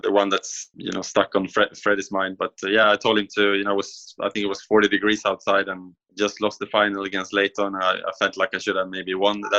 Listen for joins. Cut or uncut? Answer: uncut